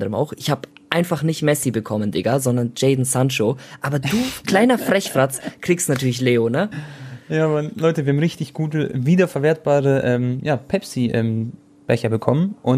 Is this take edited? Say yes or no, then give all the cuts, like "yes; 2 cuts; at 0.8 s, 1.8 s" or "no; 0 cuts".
no; 0 cuts